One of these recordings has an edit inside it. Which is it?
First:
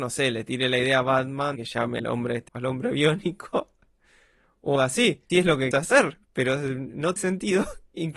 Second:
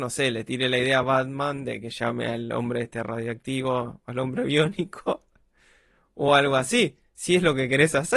first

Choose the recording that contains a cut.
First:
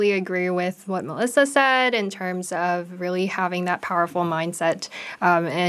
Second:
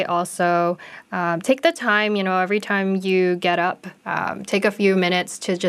second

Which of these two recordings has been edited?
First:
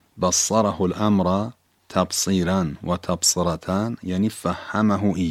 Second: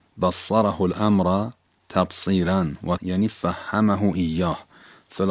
second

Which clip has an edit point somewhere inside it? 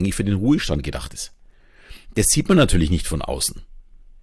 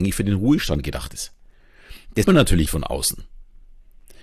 second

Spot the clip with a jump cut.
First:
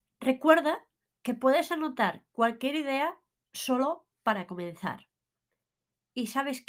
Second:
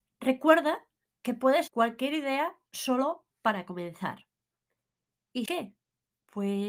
second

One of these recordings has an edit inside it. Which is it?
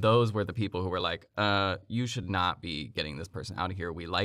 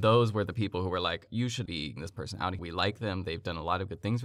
second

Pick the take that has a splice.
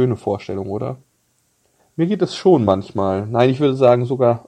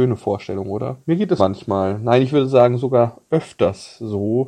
second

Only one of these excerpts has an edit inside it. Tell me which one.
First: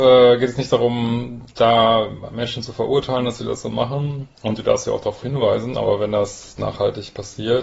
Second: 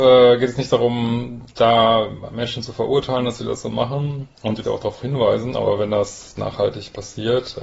second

